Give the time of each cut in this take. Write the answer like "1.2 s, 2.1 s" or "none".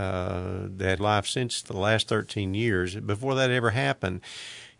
1.0 s, 1.6 s